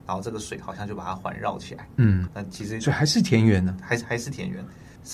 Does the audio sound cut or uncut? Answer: cut